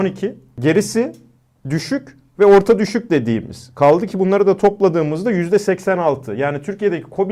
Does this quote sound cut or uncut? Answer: uncut